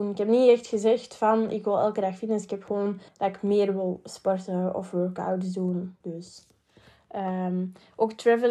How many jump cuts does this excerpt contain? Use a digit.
2